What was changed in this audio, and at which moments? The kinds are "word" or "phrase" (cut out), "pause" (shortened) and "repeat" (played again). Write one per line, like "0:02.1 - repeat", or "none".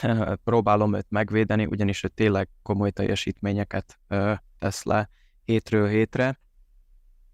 none

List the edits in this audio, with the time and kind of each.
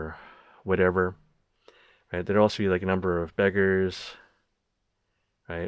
none

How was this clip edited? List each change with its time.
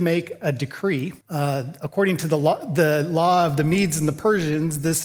0:01.2 - pause

